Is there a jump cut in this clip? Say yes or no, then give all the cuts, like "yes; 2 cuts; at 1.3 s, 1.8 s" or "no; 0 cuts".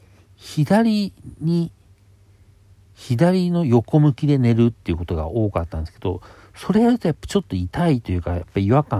no; 0 cuts